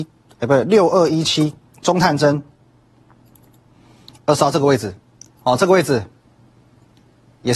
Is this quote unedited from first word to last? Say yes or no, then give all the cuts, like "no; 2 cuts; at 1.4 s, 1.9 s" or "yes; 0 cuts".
yes; 0 cuts